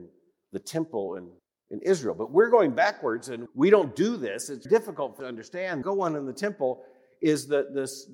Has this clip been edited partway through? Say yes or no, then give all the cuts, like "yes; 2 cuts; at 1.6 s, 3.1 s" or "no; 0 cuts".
yes; 5 cuts; at 1.4 s, 3.5 s, 4.7 s, 5.2 s, 5.8 s